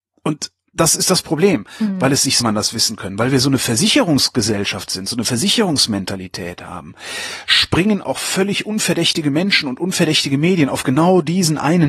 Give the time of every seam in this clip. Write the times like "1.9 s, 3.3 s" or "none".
2.4 s